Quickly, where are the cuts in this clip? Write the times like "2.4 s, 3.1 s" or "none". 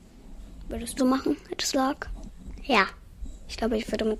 1.0 s, 1.7 s